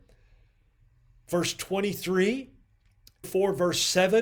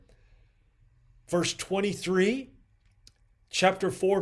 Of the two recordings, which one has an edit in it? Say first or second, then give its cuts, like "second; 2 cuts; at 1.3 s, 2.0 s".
first; 1 cut; at 3.2 s